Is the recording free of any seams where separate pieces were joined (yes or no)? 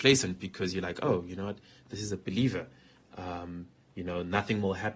yes